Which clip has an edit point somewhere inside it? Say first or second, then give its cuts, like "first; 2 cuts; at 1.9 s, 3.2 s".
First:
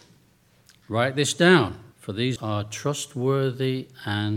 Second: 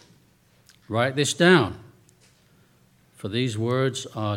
first; 2 cuts; at 1.9 s, 2.4 s